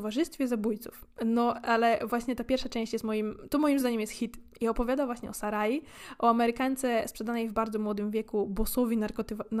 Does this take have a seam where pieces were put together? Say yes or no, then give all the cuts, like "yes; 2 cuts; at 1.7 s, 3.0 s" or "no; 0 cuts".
no; 0 cuts